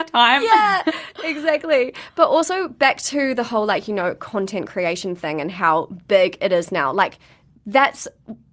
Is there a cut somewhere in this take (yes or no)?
no